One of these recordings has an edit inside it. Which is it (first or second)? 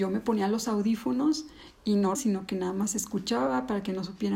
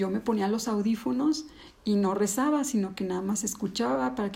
first